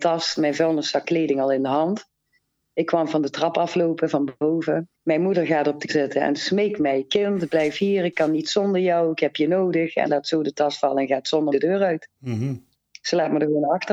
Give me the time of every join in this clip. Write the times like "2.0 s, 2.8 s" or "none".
1.0 s, 4.9 s, 5.9 s, 10.1 s, 11.5 s, 12.1 s